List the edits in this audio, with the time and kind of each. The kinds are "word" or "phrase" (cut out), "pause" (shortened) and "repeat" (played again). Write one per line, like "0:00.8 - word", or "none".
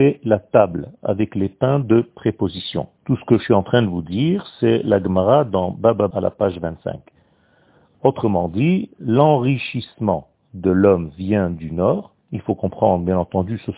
0:03.0 - pause
0:06.1 - word
0:12.2 - pause